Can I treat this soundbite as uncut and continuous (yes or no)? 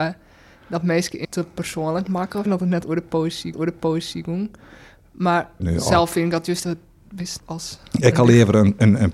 no